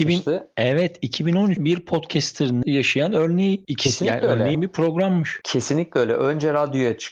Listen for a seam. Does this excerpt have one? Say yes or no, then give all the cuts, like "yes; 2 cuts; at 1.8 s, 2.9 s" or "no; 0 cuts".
yes; 3 cuts; at 1.6 s, 2.6 s, 4.5 s